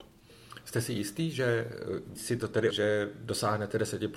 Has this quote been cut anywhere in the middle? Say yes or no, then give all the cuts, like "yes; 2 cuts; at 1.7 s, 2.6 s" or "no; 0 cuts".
yes; 2 cuts; at 2.2 s, 2.7 s